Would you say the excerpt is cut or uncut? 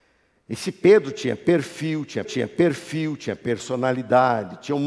cut